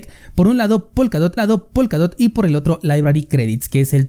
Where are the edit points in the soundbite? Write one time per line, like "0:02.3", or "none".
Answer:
0:01.4